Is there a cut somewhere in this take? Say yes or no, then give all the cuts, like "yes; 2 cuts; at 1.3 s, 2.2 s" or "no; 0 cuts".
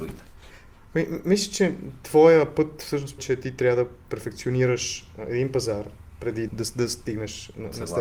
yes; 2 cuts; at 3.2 s, 6.5 s